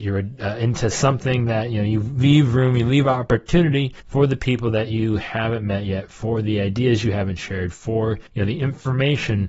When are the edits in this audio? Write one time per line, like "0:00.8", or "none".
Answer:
0:04.0
0:08.3